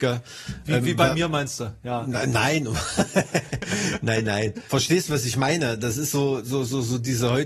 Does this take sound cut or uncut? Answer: uncut